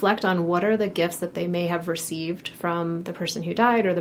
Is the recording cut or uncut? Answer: uncut